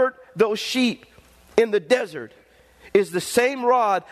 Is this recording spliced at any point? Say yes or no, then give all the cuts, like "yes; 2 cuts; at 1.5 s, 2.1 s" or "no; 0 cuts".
no; 0 cuts